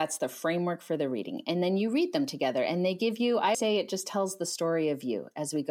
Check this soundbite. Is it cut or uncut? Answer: cut